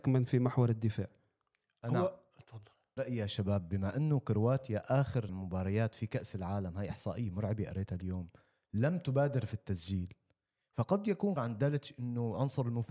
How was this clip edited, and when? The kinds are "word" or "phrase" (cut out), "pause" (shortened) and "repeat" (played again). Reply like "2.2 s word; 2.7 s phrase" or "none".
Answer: 3.0 s word; 5.3 s word; 11.4 s word